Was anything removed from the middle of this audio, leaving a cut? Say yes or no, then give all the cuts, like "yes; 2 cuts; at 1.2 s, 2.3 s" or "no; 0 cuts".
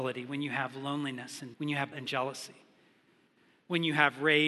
yes; 2 cuts; at 1.5 s, 1.9 s